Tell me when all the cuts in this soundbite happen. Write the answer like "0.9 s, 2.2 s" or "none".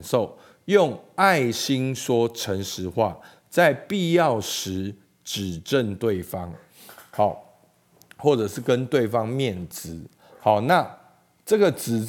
none